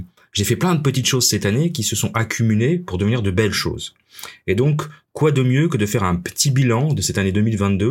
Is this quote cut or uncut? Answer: uncut